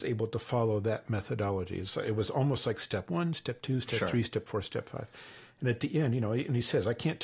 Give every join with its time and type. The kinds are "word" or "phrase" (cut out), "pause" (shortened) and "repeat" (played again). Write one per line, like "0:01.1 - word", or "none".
none